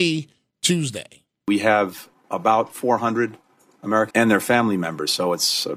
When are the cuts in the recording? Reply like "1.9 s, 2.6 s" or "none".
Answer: 2.1 s, 4.1 s